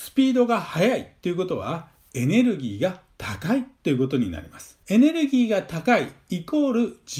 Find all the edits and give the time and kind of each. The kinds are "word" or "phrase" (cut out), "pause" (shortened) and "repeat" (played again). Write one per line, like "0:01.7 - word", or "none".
0:04.8 - pause